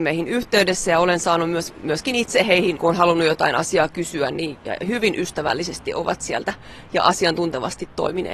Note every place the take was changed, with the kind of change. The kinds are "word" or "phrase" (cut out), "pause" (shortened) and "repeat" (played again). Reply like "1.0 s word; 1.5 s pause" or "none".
2.8 s word; 4.5 s word